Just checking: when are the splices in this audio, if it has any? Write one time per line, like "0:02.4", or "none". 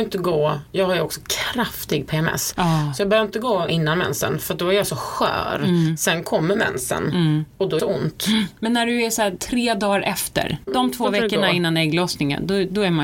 0:03.7
0:07.8
0:10.7